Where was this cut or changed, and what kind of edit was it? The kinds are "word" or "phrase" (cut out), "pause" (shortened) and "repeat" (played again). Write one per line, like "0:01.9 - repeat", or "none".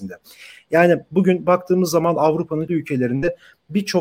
0:02.7 - word